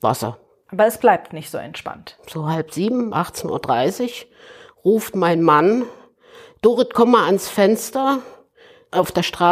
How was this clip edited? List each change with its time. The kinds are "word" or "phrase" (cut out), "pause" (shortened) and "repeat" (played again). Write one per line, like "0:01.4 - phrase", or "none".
0:03.1 - word